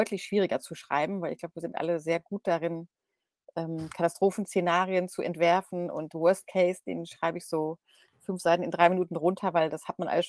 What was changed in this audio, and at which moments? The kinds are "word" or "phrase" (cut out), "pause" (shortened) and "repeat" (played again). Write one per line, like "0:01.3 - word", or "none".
none